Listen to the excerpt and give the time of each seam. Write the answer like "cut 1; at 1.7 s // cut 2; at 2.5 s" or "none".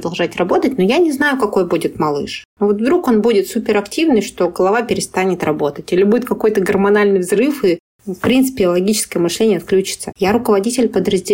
none